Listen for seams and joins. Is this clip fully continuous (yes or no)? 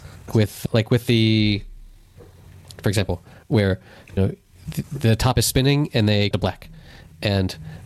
no